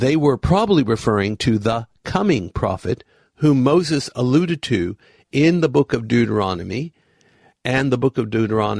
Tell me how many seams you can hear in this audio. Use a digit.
0